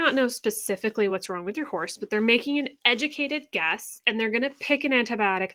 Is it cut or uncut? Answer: uncut